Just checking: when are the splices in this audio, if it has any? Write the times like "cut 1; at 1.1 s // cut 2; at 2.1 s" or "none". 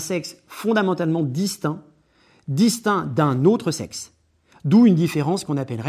none